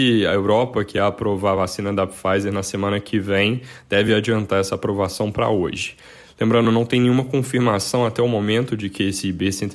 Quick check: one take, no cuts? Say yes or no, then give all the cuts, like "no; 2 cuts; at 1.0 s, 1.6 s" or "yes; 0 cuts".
yes; 0 cuts